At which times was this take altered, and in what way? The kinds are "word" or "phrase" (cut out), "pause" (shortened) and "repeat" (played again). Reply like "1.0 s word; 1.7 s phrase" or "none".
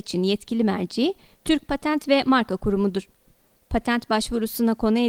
none

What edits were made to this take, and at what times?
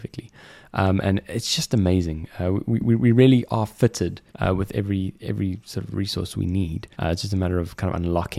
4.3 s pause; 6.9 s pause

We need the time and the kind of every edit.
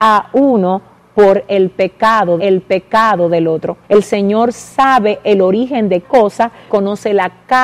2.4 s repeat; 3.8 s pause; 6.0 s word; 6.7 s word

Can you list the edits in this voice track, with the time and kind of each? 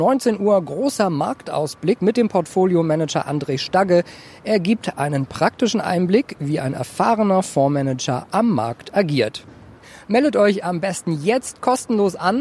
none

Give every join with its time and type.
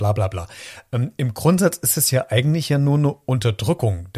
none

